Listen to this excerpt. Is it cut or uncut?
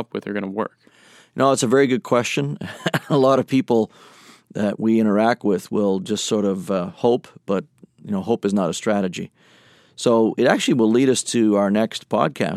uncut